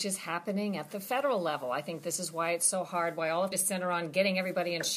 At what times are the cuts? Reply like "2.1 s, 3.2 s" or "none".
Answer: 3.5 s